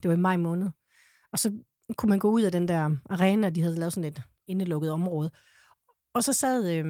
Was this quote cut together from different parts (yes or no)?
no